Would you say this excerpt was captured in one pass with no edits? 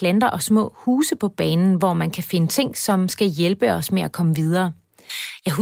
yes; 0 cuts

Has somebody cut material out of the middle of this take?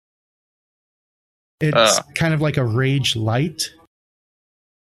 no; 0 cuts

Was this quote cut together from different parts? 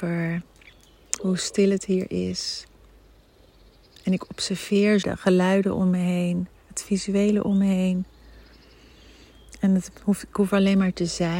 yes; 1 cut; at 5.0 s

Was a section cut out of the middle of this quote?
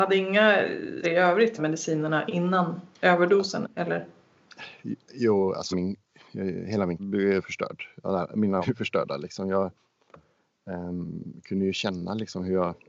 yes; 6 cuts; at 1.0 s, 1.6 s, 2.9 s, 5.7 s, 7.0 s, 8.6 s

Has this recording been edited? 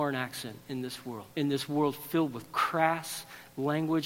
yes; 1 cut; at 1.3 s

